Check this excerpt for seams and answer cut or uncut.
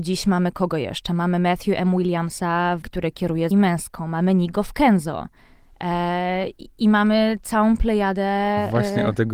cut